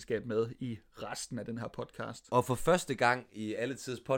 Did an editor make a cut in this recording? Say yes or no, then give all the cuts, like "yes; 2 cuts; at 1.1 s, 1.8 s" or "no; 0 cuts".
no; 0 cuts